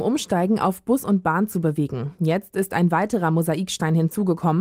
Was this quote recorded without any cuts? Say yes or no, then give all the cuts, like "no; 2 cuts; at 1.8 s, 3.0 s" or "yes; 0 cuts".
yes; 0 cuts